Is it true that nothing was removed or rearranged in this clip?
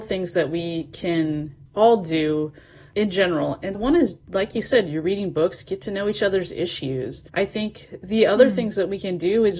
no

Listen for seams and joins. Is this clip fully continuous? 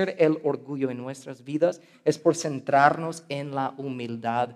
yes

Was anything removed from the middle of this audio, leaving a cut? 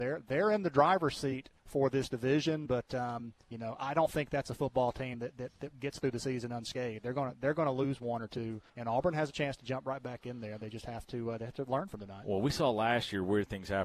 yes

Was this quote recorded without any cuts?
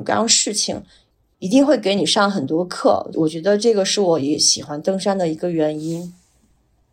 yes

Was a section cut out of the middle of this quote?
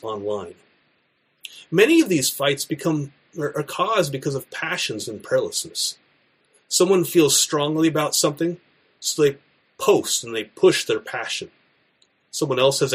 no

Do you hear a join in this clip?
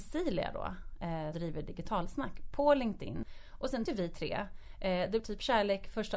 yes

